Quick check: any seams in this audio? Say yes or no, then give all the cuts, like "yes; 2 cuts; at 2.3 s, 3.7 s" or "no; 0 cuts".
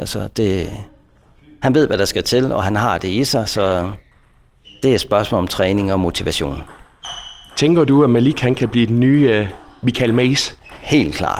no; 0 cuts